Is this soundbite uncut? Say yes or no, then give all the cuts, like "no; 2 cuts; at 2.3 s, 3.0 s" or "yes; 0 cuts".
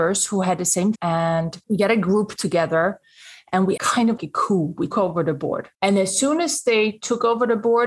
no; 6 cuts; at 0.9 s, 1.6 s, 3.8 s, 4.2 s, 4.9 s, 5.7 s